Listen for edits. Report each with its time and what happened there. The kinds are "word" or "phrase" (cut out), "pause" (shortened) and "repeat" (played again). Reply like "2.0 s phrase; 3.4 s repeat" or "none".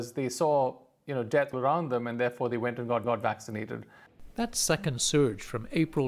1.5 s word; 3.0 s repeat